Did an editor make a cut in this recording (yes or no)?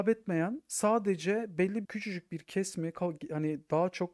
yes